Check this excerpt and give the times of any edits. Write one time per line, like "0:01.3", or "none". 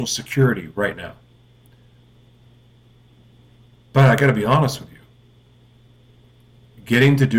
none